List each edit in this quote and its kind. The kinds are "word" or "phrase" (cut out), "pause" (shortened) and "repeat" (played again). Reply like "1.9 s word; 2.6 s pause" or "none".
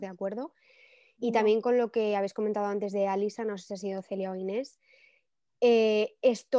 none